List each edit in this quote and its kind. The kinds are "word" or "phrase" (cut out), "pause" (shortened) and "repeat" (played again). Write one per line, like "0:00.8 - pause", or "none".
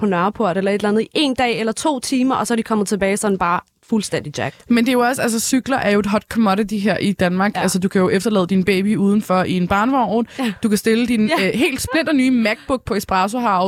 none